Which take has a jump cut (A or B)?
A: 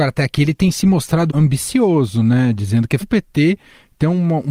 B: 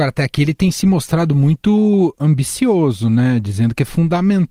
A